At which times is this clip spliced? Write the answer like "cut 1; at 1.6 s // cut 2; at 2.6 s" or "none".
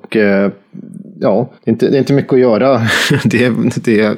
cut 1; at 1.6 s